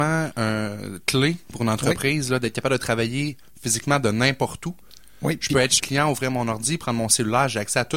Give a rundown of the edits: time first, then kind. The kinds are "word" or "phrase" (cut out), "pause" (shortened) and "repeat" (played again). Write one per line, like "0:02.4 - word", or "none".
0:05.8 - word